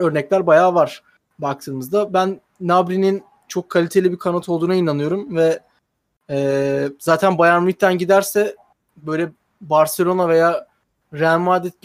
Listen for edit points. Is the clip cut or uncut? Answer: uncut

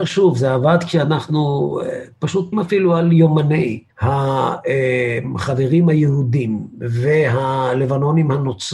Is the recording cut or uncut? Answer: cut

